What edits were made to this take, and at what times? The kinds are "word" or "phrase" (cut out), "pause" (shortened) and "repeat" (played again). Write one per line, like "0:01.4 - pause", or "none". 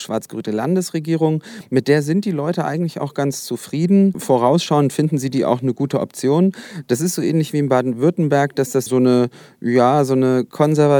0:08.9 - word